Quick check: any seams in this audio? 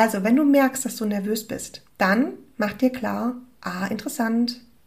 yes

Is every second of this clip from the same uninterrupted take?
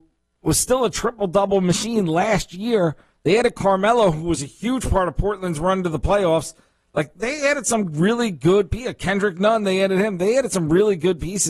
yes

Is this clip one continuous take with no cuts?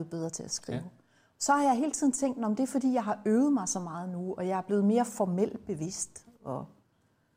yes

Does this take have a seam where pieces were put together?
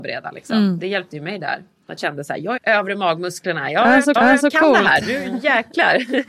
yes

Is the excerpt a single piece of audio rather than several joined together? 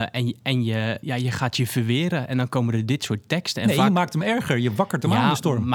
no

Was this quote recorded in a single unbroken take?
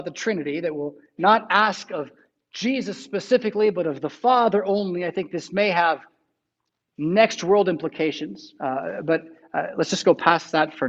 yes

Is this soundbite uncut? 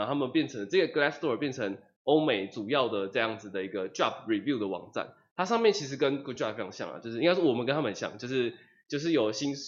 yes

